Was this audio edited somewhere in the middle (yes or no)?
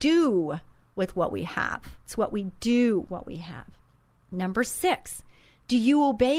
yes